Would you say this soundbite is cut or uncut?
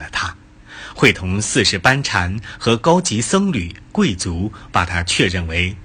cut